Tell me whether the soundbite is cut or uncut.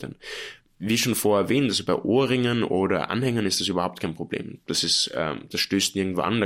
uncut